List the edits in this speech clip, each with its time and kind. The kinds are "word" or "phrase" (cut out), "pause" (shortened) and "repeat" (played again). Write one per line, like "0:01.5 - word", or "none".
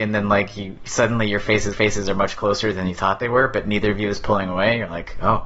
0:01.7 - repeat